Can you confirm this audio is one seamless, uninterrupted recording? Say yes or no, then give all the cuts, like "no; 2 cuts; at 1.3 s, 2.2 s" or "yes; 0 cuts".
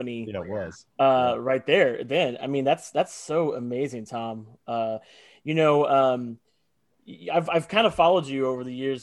yes; 0 cuts